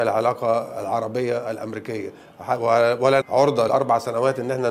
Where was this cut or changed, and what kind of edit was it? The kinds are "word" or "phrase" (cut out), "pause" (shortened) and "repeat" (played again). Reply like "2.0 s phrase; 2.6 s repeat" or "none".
3.2 s word; 3.7 s word